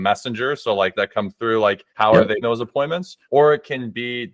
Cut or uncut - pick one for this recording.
cut